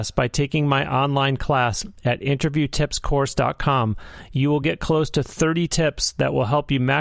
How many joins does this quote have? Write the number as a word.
zero